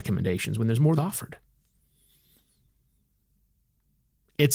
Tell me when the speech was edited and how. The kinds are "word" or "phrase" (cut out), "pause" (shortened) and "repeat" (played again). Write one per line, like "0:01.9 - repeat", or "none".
0:01.0 - phrase